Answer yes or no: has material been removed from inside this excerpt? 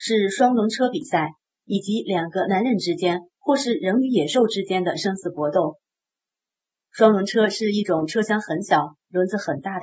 no